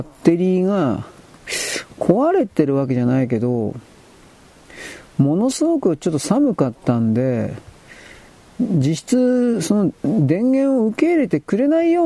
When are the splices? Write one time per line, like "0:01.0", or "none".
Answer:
none

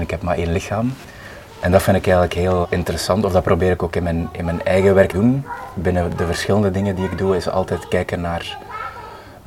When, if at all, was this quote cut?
0:02.6
0:05.1

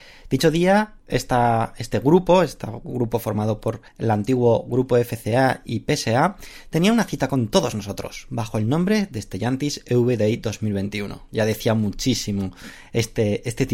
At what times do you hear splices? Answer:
0:01.0
0:03.9

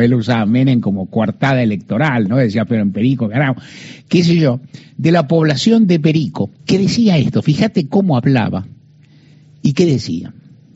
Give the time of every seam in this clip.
0:02.7
0:06.6

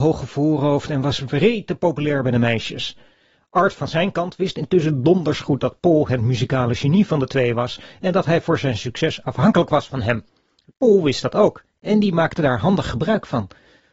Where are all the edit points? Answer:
none

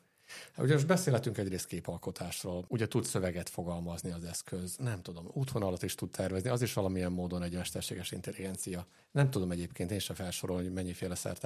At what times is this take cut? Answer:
none

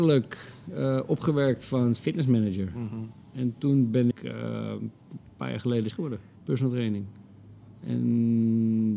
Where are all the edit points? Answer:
0:02.0
0:03.2
0:04.1
0:05.3
0:05.9
0:06.3

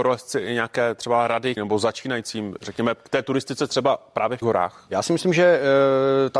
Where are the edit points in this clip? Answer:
0:01.6
0:04.4

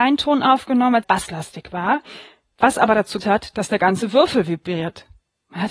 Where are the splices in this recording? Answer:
0:01.0
0:03.2

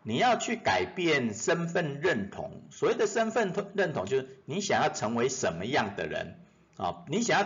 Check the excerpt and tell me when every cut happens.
none

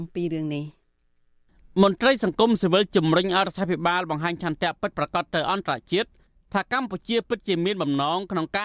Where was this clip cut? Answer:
none

